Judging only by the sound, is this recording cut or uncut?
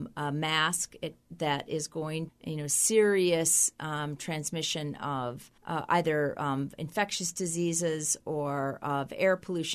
cut